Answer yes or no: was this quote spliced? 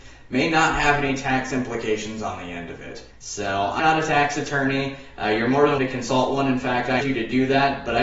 yes